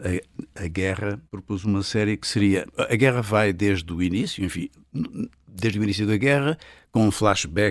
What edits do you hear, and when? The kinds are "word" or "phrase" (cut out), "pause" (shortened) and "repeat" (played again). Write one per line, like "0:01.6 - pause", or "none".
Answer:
0:01.3 - pause